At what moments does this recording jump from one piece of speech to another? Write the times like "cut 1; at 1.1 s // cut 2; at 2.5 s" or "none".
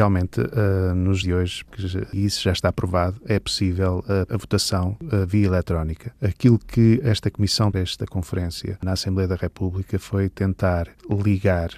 cut 1; at 1.2 s // cut 2; at 1.7 s // cut 3; at 7.7 s